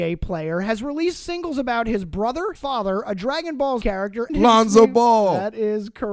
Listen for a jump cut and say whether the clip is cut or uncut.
cut